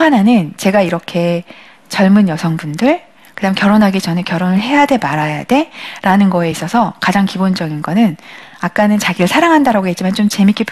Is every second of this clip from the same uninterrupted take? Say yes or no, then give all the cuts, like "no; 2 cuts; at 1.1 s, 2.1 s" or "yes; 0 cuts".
yes; 0 cuts